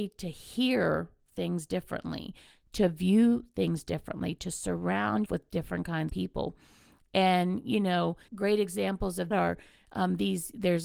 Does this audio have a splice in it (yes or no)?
yes